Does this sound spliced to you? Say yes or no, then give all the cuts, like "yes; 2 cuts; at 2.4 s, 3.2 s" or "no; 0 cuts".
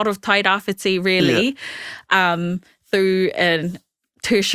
no; 0 cuts